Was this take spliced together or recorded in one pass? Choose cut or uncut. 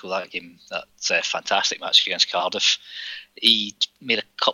uncut